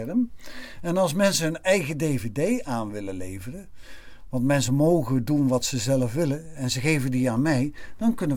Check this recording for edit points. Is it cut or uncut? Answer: uncut